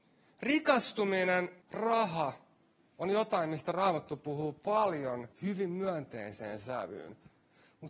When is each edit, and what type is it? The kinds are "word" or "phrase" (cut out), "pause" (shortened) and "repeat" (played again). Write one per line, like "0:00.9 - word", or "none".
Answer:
0:01.6 - pause
0:05.3 - pause